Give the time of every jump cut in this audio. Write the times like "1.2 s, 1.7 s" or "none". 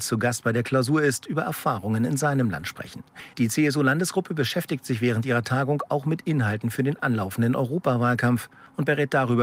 none